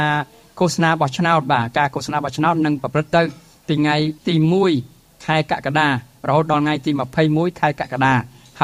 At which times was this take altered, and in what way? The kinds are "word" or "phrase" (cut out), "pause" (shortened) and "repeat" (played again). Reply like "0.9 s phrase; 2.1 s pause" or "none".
4.2 s pause